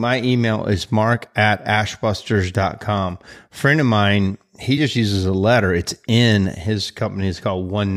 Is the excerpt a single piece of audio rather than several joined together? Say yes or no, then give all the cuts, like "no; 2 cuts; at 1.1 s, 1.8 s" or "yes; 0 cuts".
yes; 0 cuts